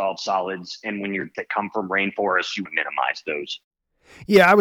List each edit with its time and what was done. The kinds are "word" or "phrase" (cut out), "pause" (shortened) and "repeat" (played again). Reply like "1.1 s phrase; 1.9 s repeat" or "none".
1.3 s phrase; 2.7 s word